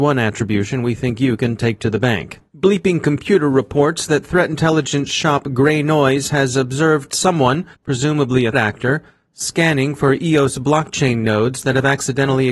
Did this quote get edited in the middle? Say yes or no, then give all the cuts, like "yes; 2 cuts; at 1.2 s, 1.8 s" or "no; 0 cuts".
yes; 3 cuts; at 2.5 s, 7.7 s, 8.5 s